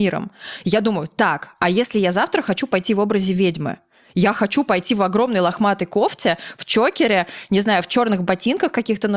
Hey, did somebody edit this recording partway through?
no; 0 cuts

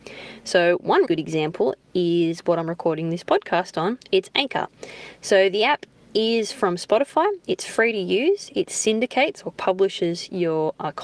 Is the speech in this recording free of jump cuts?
no; 1 cut; at 1.0 s

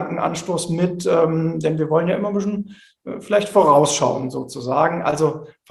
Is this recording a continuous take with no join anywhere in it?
yes; 0 cuts

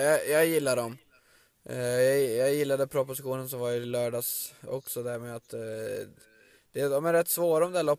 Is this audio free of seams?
yes; 0 cuts

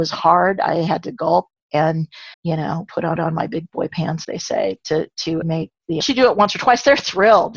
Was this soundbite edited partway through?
yes; 5 cuts; at 2.3 s, 3.2 s, 4.2 s, 5.4 s, 6.0 s

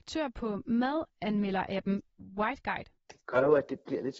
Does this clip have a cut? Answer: yes; 2 cuts; at 1.1 s, 3.0 s

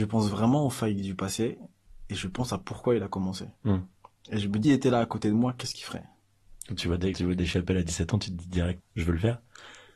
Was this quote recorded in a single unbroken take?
no; 5 cuts; at 3.6 s, 4.6 s, 6.6 s, 7.1 s, 8.8 s

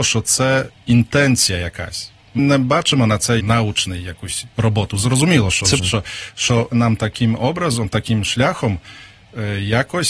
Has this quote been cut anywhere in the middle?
yes; 4 cuts; at 2.4 s, 3.4 s, 5.8 s, 6.7 s

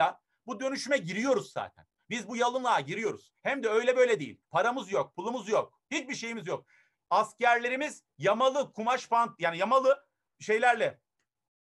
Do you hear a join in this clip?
yes; 1 cut; at 10.3 s

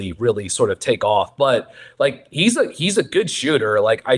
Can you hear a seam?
no; 0 cuts

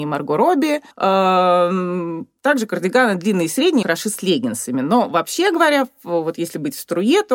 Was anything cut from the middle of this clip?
yes; 2 cuts; at 0.9 s, 3.8 s

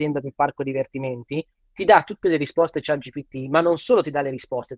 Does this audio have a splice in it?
no; 0 cuts

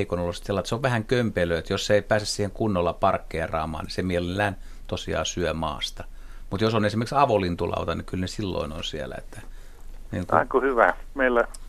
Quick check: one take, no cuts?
yes; 0 cuts

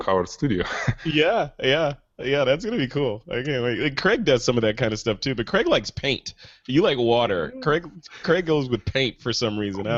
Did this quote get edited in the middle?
no; 0 cuts

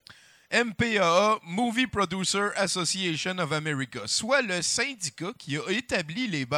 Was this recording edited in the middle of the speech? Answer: no; 0 cuts

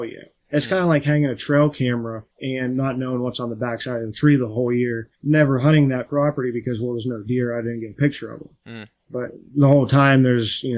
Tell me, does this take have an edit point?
yes; 2 cuts; at 2.3 s, 5.1 s

